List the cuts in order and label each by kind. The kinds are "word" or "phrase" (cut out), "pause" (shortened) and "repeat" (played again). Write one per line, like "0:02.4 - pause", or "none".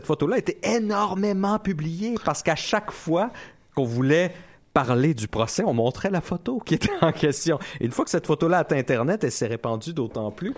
none